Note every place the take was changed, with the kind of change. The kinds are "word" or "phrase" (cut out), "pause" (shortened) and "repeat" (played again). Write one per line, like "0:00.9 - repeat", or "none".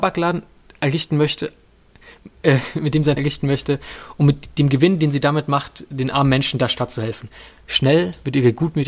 0:03.2 - word

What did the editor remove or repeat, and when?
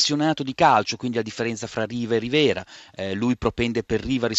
none

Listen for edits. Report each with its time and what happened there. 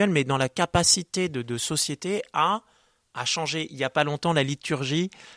none

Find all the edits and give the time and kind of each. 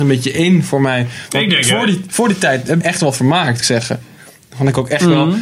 0:02.8 - word
0:03.6 - phrase

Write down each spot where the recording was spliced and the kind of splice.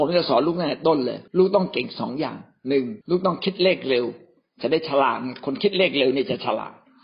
0:01.3 - pause
0:03.0 - pause

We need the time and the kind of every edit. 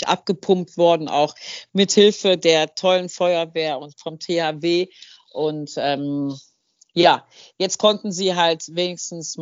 none

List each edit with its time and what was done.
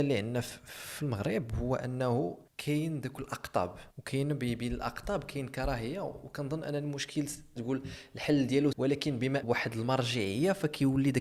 0:02.5 - pause
0:03.9 - pause
0:07.6 - word
0:08.7 - word
0:09.4 - phrase

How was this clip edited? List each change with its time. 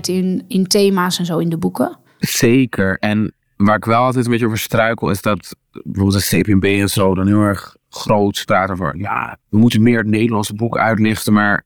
0:09.4 - pause

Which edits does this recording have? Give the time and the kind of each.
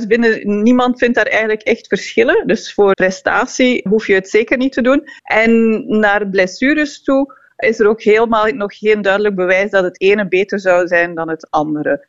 0:02.9 - word
0:03.9 - word
0:05.2 - pause
0:07.6 - word

